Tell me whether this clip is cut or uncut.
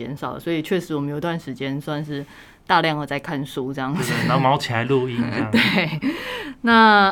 uncut